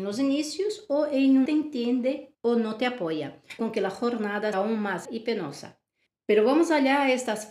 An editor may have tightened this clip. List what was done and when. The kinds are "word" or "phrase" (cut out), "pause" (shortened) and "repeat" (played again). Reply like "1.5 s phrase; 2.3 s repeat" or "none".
1.5 s phrase; 2.3 s pause; 3.6 s word; 4.5 s word; 5.0 s word

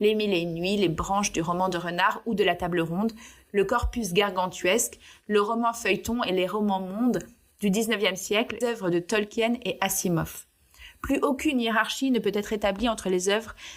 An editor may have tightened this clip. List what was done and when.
8.6 s word

